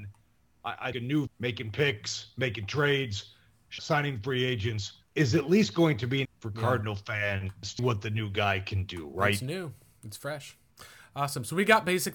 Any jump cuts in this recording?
yes; 6 cuts; at 0.9 s, 1.3 s, 3.8 s, 5.0 s, 6.2 s, 7.8 s

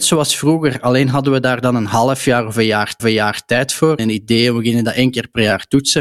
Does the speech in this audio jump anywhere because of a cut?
yes; 2 cuts; at 3.0 s, 4.0 s

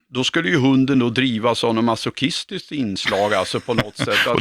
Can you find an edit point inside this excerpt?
no; 0 cuts

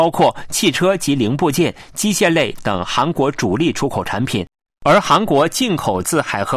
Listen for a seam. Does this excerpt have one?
no; 0 cuts

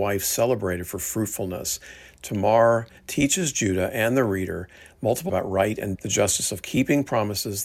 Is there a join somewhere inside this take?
yes; 2 cuts; at 5.3 s, 5.9 s

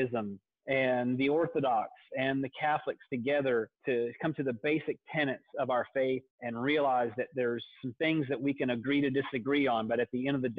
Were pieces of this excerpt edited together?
yes; 2 cuts; at 3.8 s, 6.3 s

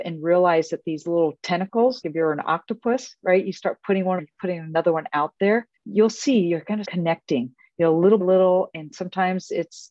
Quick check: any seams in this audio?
yes; 5 cuts; at 2.0 s, 4.2 s, 5.8 s, 6.8 s, 8.2 s

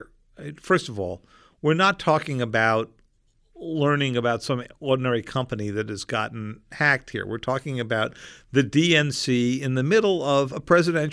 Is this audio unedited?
yes; 0 cuts

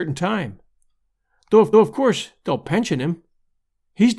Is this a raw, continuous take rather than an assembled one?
no; 1 cut; at 1.7 s

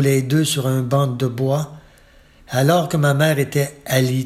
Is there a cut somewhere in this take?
no; 0 cuts

